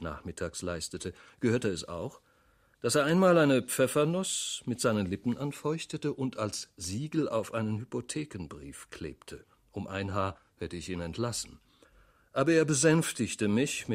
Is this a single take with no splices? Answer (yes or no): yes